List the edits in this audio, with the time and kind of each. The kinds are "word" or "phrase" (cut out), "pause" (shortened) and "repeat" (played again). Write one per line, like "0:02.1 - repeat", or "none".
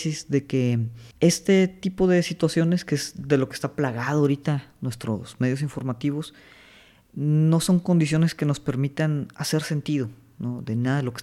0:01.1 - pause